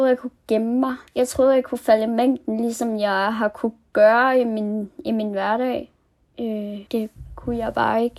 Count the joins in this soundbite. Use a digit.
2